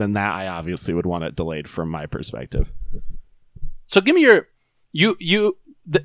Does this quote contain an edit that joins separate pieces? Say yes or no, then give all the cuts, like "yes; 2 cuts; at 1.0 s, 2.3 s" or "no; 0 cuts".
no; 0 cuts